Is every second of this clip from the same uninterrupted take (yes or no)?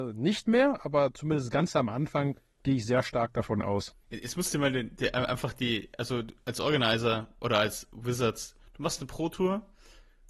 no